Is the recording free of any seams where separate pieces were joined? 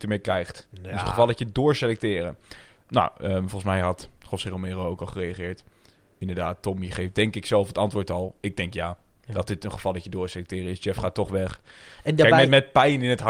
yes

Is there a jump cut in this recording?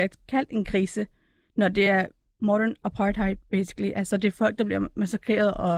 no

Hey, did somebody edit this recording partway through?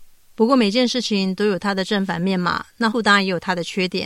yes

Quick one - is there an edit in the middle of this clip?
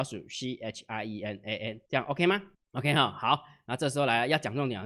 yes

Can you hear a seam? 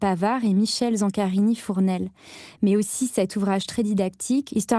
no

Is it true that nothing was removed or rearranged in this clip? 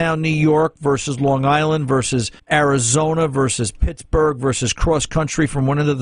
no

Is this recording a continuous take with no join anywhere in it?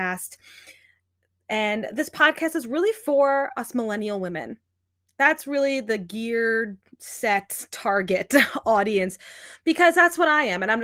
yes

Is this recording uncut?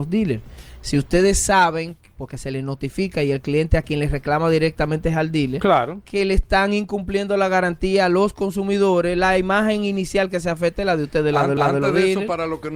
no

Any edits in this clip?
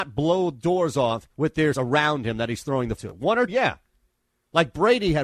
yes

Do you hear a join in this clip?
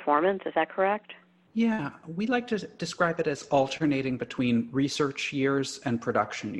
no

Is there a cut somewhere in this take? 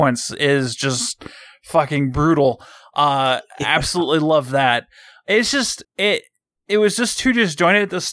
yes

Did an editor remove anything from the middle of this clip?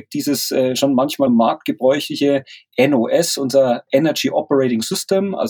yes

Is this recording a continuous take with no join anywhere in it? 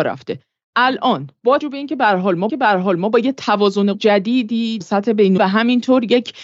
no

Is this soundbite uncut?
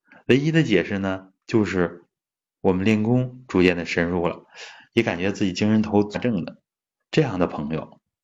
no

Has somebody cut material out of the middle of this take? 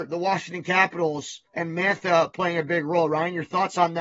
yes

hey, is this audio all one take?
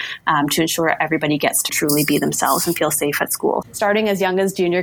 no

